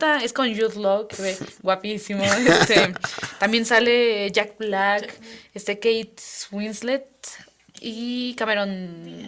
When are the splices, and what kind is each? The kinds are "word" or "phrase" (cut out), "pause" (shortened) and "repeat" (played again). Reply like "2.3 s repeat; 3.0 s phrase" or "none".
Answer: 1.1 s word

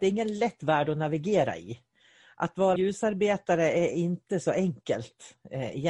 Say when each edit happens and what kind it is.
2.8 s word

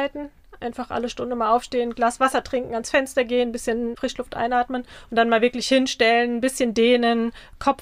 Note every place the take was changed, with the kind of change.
none

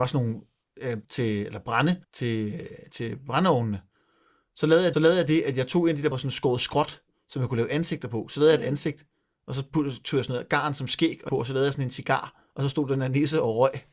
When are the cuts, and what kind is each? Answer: 1.0 s word; 2.0 s pause; 4.9 s repeat; 6.1 s word; 11.3 s word; 12.5 s pause

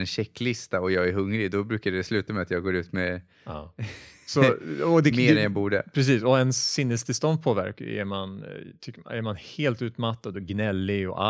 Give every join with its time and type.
none

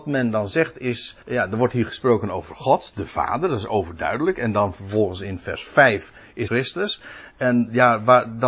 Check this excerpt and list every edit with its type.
1.2 s pause; 6.5 s phrase

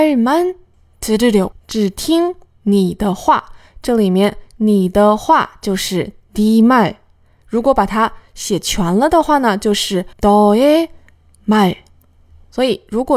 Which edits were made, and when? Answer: 1.5 s word; 10.1 s pause

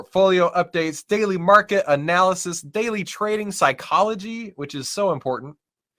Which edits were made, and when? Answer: none

